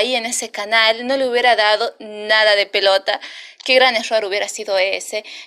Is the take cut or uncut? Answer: uncut